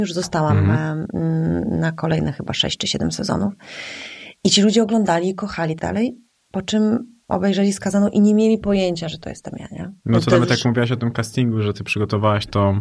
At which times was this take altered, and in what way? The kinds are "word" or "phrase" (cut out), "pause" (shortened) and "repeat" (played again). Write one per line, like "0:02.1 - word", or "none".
0:05.8 - phrase
0:10.0 - pause